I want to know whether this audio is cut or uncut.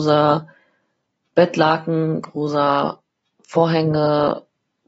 uncut